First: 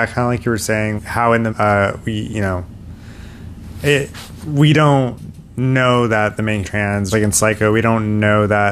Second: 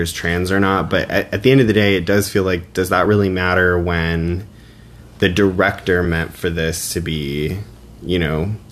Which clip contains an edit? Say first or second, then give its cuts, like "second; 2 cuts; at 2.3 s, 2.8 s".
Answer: first; 5 cuts; at 1.0 s, 1.5 s, 4.4 s, 6.6 s, 7.1 s